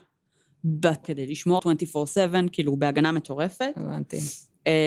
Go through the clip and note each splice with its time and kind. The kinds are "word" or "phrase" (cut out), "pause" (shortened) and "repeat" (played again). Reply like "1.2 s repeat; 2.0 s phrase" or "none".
1.0 s word; 1.6 s phrase